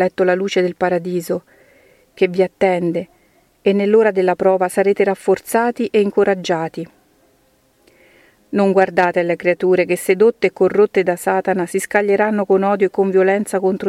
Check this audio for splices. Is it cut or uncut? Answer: uncut